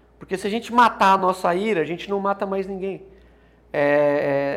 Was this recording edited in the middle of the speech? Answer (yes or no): no